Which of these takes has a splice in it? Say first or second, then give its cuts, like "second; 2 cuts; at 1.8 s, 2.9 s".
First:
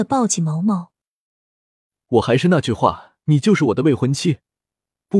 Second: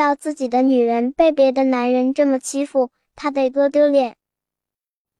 first; 1 cut; at 3.2 s